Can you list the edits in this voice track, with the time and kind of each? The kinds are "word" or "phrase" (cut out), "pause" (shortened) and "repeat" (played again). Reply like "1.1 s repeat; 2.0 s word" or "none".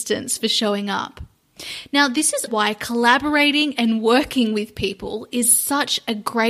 2.5 s word